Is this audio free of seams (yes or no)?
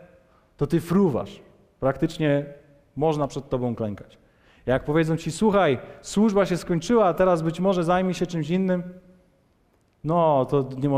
yes